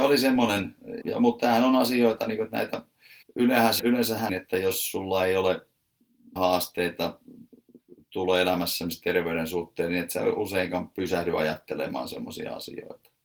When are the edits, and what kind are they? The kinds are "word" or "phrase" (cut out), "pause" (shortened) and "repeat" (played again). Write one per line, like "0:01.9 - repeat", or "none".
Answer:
0:01.0 - word
0:03.2 - pause
0:03.8 - word
0:04.3 - phrase
0:06.4 - word